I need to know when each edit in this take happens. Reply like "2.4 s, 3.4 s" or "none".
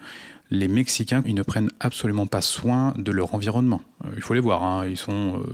1.2 s